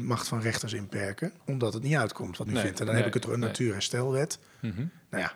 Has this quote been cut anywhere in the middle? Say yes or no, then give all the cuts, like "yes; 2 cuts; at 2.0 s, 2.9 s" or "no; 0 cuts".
yes; 3 cuts; at 1.4 s, 2.5 s, 3.2 s